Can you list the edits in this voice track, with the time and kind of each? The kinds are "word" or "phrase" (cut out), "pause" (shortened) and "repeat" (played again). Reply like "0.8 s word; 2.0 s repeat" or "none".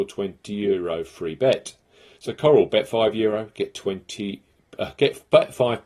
none